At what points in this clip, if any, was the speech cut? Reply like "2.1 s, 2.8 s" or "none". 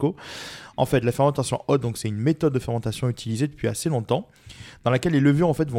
none